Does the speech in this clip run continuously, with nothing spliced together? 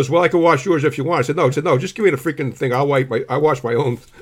no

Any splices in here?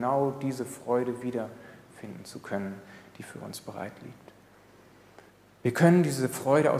yes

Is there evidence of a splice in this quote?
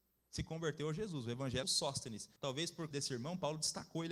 yes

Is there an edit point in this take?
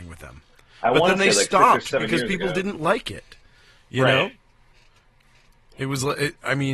no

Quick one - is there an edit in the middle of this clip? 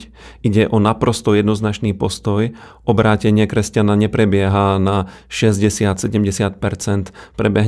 no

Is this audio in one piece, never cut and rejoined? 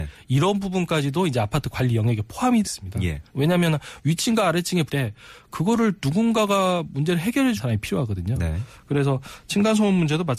no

